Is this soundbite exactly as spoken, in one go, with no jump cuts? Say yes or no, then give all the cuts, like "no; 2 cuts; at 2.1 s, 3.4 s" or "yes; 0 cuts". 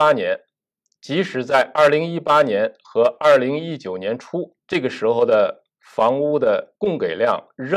no; 1 cut; at 4.6 s